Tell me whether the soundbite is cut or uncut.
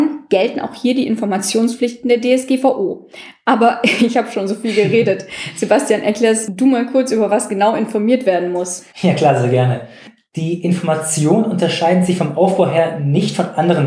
cut